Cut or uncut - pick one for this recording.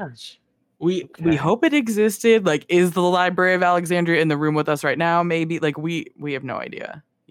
uncut